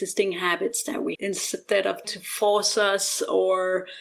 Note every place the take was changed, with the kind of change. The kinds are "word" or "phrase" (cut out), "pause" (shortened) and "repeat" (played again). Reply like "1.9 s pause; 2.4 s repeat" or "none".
1.1 s word; 2.0 s word